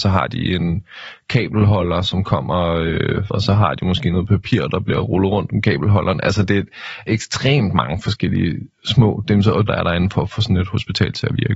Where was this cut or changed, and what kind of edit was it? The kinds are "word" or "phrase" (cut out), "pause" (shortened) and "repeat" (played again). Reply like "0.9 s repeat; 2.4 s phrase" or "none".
3.3 s phrase; 7.1 s word; 9.7 s word